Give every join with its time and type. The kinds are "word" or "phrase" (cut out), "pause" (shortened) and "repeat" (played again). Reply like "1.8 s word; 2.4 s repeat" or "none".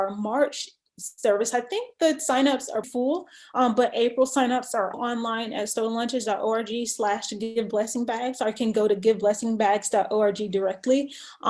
2.8 s word; 4.9 s word